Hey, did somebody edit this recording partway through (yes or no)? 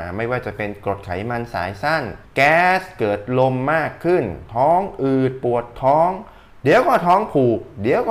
yes